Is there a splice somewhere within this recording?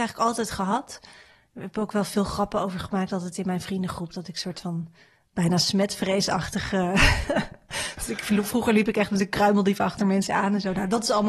no; 0 cuts

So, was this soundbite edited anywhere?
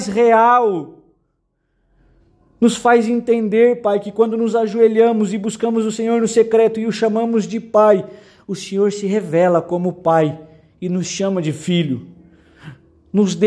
no; 0 cuts

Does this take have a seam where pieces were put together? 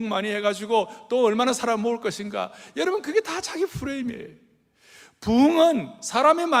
no; 0 cuts

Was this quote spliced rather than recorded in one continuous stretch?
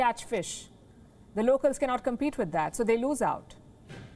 no; 0 cuts

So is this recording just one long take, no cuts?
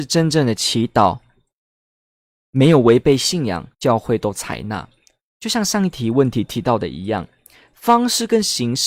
no; 1 cut; at 3.7 s

